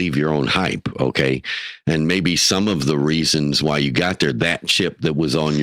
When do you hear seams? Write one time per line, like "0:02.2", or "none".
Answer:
none